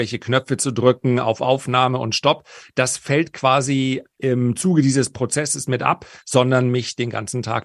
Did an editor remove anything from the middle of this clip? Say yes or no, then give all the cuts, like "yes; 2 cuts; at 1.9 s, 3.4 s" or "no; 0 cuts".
no; 0 cuts